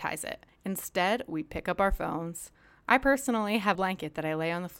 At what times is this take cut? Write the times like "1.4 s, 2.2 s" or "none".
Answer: 3.7 s